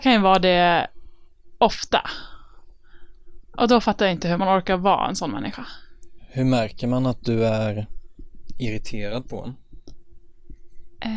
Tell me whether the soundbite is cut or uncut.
uncut